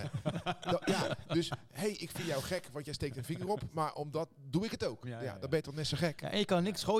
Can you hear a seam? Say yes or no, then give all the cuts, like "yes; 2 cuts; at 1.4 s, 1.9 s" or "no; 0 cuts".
no; 0 cuts